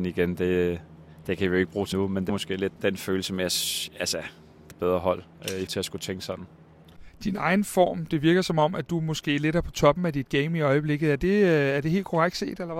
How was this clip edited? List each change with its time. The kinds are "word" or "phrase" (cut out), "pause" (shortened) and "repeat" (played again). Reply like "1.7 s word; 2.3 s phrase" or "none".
1.9 s word; 2.3 s word; 2.8 s word; 4.7 s phrase; 5.7 s word